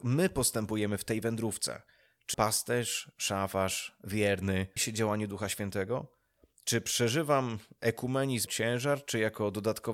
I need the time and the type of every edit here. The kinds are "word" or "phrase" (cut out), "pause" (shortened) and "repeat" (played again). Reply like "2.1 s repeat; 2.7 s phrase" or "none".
2.3 s word; 4.8 s word; 8.5 s word

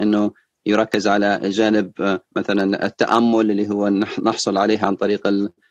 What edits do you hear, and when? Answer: 2.2 s pause

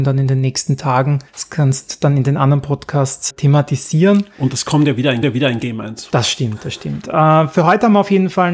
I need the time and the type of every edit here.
1.3 s pause; 3.3 s word; 5.2 s repeat

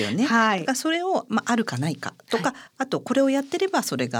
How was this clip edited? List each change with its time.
2.7 s pause

